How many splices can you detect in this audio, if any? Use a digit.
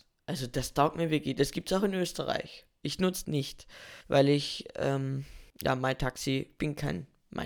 3